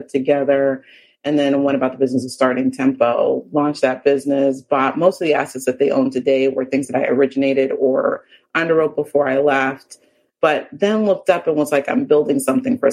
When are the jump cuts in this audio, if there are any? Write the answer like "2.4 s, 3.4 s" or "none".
none